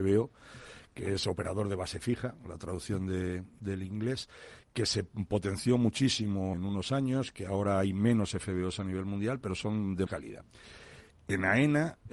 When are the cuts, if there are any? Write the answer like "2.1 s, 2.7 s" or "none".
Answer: 6.5 s, 10.1 s